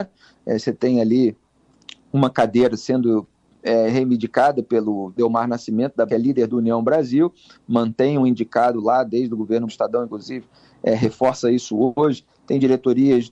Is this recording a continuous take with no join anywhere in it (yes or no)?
no